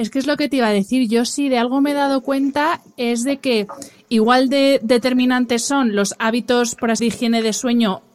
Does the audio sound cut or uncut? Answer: cut